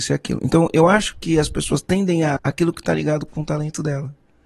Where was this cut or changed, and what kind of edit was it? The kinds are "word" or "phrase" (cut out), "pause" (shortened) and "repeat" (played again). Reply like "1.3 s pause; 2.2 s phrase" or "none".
2.4 s word